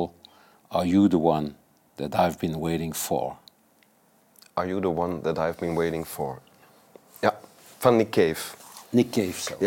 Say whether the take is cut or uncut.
uncut